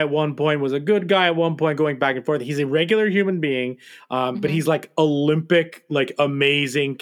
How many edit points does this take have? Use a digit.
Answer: 0